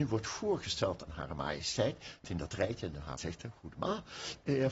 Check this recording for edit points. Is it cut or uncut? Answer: cut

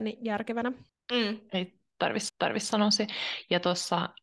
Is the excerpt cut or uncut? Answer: cut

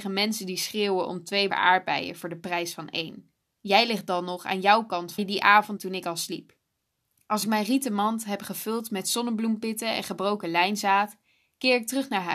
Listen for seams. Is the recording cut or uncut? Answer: cut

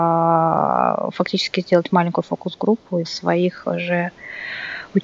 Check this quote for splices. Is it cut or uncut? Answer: cut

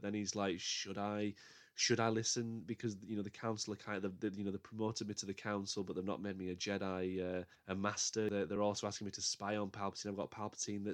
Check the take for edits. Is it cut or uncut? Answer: uncut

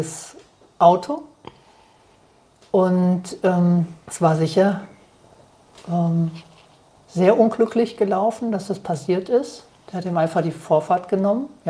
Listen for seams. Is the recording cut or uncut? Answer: cut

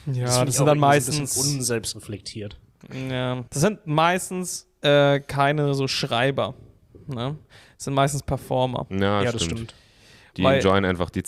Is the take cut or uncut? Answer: cut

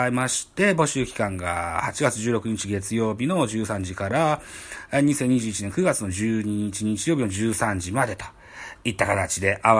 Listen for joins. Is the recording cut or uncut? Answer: uncut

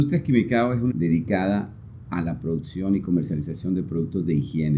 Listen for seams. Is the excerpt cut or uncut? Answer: cut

